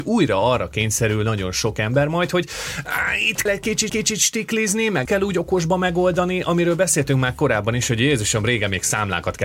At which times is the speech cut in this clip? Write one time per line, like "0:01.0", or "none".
0:03.5
0:03.9
0:05.1